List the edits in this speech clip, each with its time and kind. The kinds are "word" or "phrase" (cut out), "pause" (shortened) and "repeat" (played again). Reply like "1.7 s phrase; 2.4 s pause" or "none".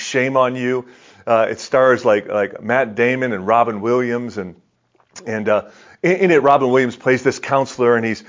none